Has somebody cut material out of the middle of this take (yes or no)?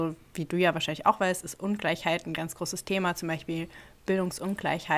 no